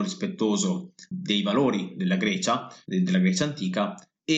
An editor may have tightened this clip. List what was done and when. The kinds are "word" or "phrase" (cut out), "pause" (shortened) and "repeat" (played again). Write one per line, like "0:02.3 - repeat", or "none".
0:01.1 - word